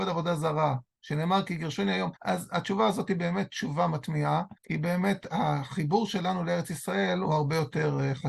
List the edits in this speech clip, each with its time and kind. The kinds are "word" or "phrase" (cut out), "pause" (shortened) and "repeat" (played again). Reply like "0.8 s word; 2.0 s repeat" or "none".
2.2 s pause; 4.6 s pause